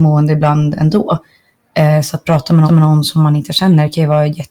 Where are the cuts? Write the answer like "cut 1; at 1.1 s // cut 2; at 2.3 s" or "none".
cut 1; at 2.7 s